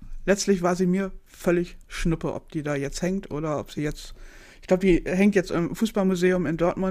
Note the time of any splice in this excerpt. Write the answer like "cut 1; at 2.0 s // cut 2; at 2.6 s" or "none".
none